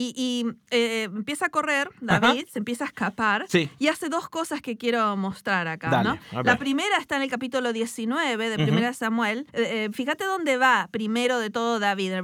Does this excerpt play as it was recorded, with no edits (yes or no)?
no